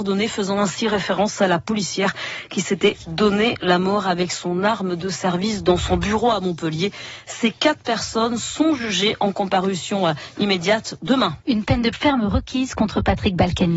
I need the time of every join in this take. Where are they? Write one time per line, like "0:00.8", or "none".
0:11.4
0:11.9